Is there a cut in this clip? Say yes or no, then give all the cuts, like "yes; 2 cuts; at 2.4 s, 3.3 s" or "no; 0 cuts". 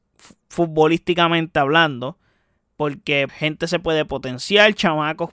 yes; 1 cut; at 3.3 s